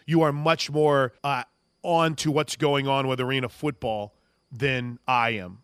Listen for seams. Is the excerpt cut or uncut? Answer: cut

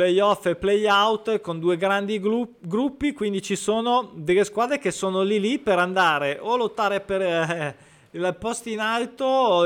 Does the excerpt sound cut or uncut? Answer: uncut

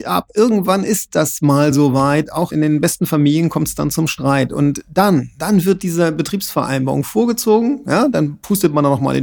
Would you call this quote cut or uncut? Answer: uncut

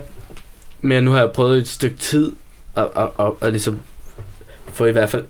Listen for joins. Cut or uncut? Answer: uncut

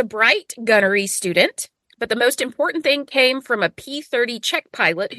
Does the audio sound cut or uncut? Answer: uncut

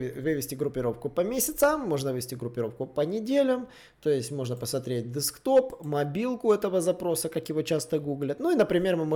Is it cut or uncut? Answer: uncut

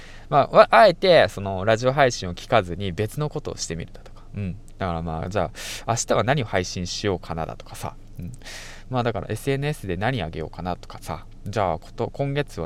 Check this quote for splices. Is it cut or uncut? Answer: uncut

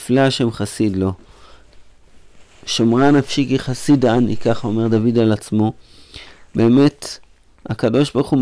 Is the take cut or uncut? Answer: uncut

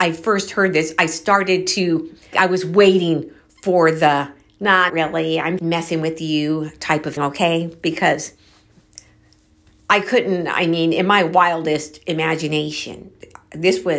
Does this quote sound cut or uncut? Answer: cut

